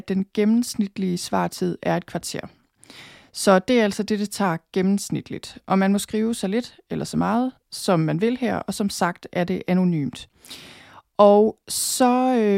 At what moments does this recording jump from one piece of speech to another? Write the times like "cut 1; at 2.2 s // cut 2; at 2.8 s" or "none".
none